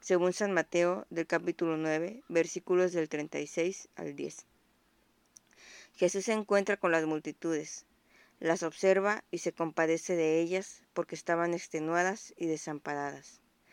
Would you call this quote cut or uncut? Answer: uncut